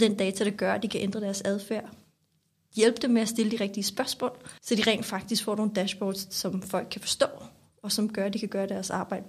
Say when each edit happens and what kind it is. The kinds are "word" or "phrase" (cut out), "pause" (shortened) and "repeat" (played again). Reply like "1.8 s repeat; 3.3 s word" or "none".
4.6 s pause